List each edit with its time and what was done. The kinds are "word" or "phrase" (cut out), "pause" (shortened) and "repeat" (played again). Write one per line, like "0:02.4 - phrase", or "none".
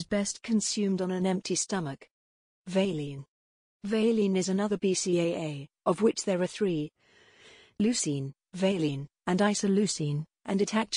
none